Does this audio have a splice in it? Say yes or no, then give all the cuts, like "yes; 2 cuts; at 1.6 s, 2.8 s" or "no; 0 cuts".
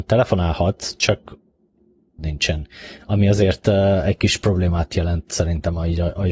yes; 1 cut; at 2.2 s